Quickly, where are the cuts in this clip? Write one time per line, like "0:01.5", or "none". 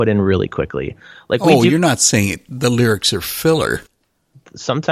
none